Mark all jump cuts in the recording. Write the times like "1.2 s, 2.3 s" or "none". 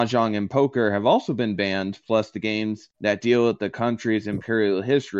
2.9 s